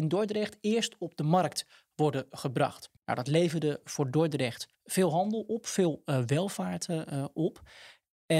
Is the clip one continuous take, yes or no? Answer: no